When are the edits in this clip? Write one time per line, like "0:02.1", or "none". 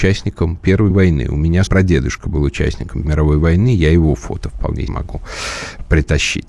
0:00.9
0:01.7
0:03.0
0:04.9